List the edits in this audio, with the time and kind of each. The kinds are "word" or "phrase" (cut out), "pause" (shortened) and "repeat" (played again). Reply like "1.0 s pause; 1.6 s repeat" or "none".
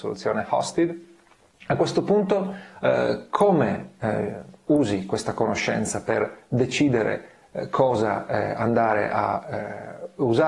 none